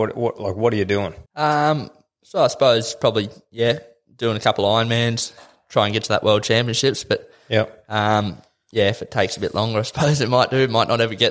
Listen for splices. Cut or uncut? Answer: cut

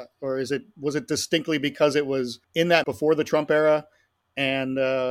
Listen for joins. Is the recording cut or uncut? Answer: cut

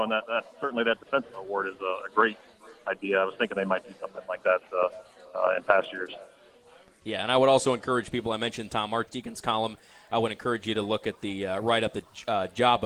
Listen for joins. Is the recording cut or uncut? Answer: uncut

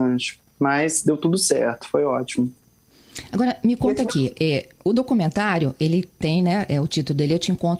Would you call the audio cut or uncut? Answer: uncut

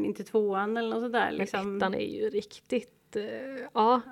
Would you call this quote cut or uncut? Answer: uncut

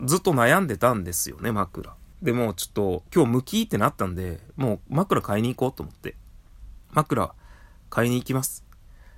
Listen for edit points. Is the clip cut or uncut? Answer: cut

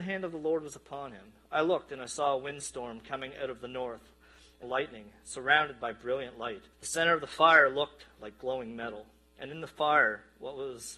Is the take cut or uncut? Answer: cut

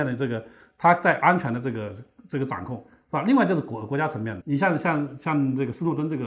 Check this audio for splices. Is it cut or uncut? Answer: cut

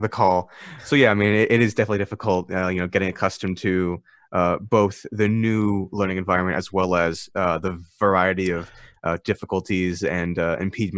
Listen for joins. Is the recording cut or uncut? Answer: uncut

